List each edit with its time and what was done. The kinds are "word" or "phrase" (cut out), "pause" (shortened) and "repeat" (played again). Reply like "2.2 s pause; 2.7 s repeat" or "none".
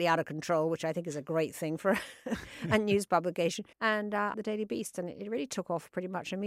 3.7 s pause; 4.3 s phrase